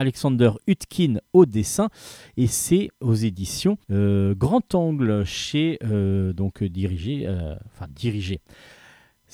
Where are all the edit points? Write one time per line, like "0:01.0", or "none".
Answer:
0:02.9
0:03.8